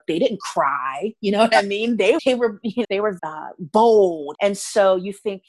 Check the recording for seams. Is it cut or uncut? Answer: cut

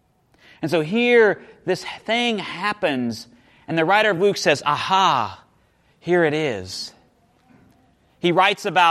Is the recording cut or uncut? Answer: uncut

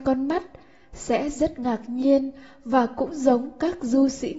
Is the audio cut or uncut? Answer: uncut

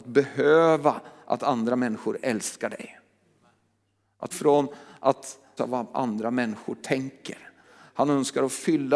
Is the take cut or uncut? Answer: cut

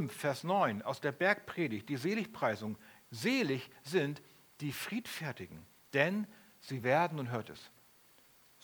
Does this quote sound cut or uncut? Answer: uncut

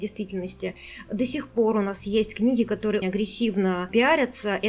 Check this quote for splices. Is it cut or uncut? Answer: cut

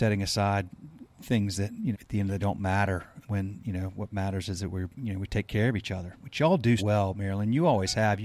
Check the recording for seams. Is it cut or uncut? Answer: cut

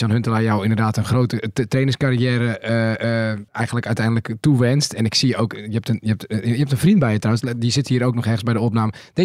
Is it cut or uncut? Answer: cut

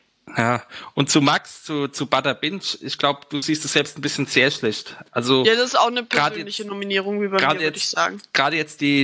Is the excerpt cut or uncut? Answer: uncut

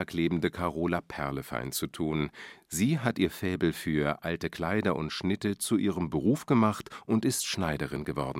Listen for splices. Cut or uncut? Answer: uncut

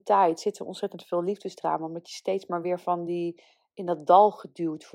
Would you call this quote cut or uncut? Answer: uncut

